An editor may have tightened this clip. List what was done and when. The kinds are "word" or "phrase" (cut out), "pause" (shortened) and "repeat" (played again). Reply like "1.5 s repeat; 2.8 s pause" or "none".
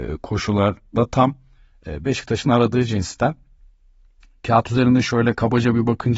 none